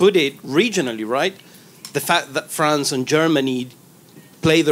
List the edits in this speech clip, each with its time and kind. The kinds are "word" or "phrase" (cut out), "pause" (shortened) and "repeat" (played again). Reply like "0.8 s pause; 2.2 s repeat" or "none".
none